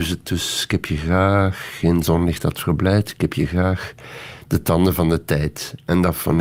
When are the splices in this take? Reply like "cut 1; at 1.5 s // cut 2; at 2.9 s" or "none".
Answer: none